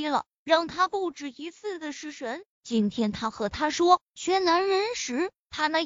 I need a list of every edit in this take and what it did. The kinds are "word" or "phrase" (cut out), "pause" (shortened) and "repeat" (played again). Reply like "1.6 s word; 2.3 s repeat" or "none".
2.5 s pause